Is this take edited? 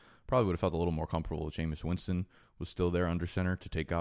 no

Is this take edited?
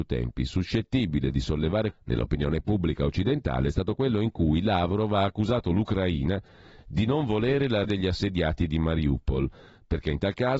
yes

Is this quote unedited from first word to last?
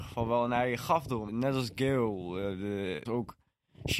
no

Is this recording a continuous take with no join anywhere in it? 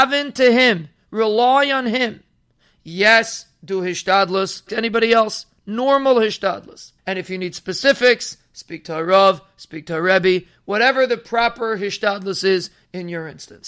no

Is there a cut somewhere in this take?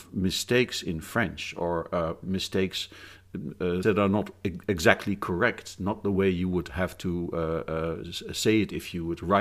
yes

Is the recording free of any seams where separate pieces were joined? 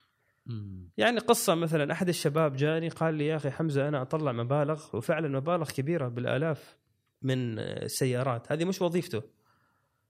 yes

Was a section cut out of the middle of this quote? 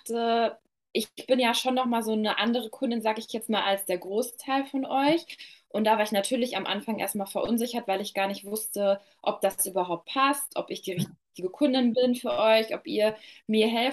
no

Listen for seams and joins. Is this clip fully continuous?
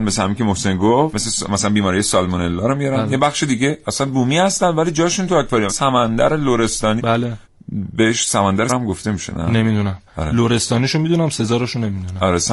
no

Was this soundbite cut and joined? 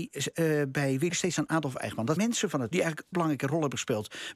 yes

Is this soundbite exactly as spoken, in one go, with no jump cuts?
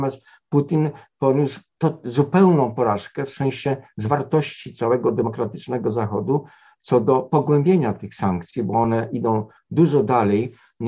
yes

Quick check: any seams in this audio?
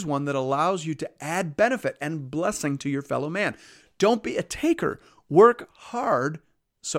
no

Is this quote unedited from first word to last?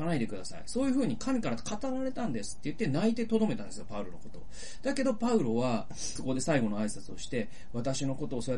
no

